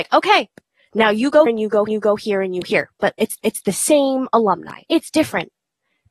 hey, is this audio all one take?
no; 5 cuts; at 1.5 s, 1.9 s, 2.6 s, 3.4 s, 4.8 s

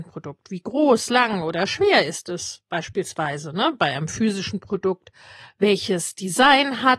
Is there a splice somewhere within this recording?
no; 0 cuts

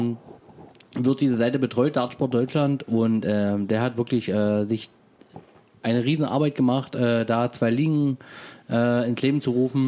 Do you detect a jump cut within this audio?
no; 0 cuts

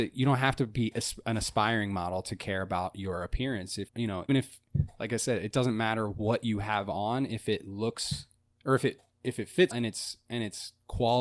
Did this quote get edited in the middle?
yes; 3 cuts; at 3.9 s, 4.3 s, 9.7 s

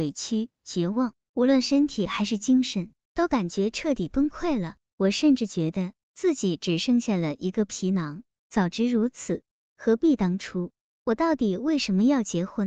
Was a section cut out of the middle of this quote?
no; 0 cuts

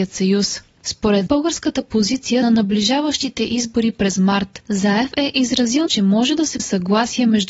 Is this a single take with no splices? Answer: no; 4 cuts; at 1.3 s, 2.4 s, 5.9 s, 6.6 s

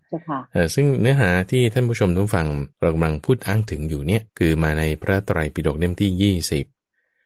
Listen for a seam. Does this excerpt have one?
yes; 2 cuts; at 2.7 s, 4.3 s

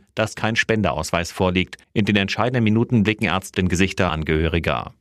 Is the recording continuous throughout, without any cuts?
no; 3 cuts; at 1.8 s, 3.5 s, 4.1 s

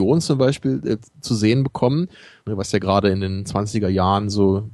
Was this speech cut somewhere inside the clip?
no; 0 cuts

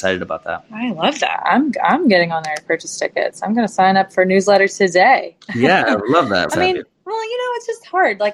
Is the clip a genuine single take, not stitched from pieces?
no; 1 cut; at 6.5 s

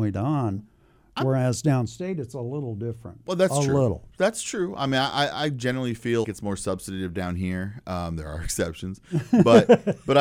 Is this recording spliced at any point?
yes; 1 cut; at 6.2 s

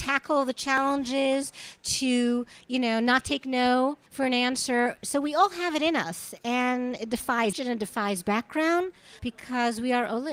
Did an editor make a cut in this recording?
yes; 3 cuts; at 4.1 s, 7.5 s, 9.2 s

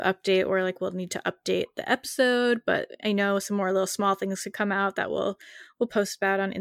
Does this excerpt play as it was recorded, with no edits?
yes; 0 cuts

